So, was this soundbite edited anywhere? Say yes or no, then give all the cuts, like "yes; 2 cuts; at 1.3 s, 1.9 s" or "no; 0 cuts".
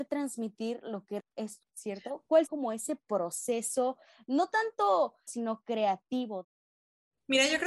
yes; 4 cuts; at 1.2 s, 1.6 s, 2.5 s, 5.3 s